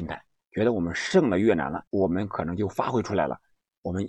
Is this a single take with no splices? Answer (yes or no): no